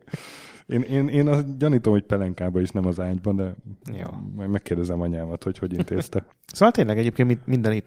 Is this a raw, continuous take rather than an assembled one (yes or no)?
no